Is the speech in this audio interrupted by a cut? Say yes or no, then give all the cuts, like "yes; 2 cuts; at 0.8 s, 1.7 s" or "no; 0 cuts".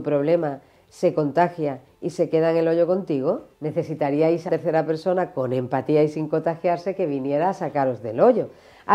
yes; 2 cuts; at 3.5 s, 4.5 s